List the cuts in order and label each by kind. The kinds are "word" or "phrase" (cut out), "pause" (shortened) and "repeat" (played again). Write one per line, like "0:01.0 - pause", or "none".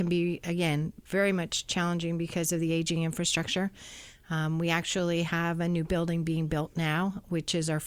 none